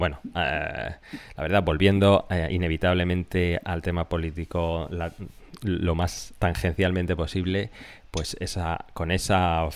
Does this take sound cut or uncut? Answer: uncut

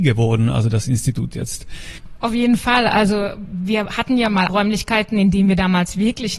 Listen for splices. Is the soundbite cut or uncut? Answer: cut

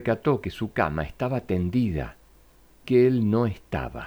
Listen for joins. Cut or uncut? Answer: cut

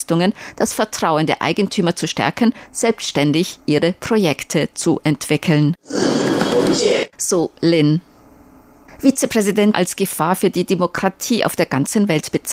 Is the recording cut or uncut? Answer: cut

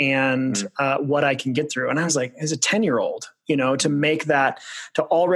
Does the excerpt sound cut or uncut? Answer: uncut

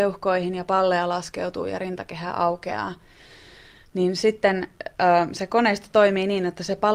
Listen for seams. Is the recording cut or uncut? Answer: uncut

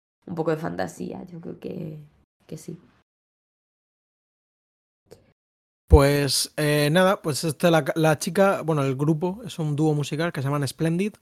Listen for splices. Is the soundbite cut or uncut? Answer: uncut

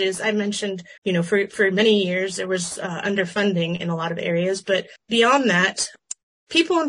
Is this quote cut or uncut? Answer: cut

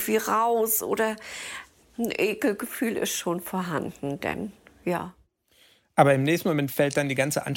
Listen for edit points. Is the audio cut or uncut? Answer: uncut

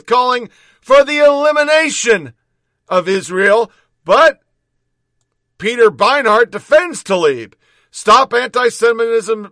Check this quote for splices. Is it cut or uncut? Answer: uncut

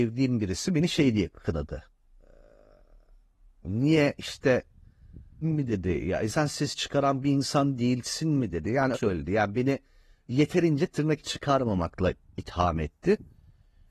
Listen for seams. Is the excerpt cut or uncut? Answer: cut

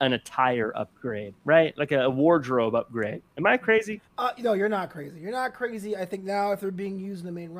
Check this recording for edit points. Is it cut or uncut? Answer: cut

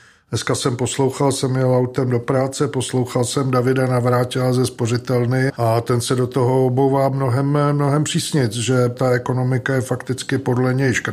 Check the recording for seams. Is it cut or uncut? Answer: uncut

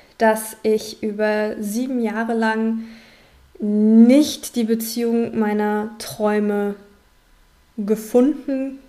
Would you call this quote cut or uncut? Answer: uncut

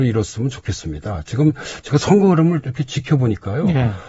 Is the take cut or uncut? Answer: uncut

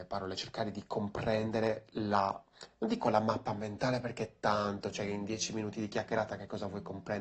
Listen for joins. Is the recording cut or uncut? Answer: uncut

